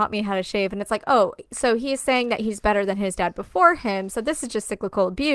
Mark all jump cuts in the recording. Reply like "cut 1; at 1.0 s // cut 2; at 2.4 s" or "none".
none